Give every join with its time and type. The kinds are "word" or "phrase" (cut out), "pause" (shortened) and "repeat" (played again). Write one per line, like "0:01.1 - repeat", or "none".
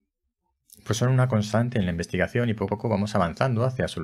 0:02.7 - word